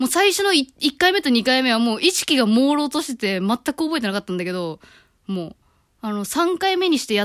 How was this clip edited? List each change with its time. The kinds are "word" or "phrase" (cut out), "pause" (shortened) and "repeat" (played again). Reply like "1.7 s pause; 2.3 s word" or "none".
none